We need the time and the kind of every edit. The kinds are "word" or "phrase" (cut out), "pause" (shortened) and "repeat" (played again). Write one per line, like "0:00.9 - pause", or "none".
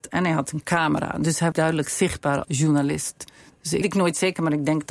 0:01.5 - word
0:02.4 - word
0:03.8 - phrase